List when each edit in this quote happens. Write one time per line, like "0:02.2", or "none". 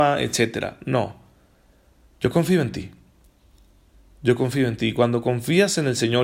none